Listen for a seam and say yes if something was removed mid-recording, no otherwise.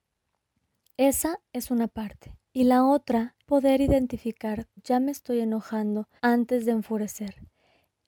yes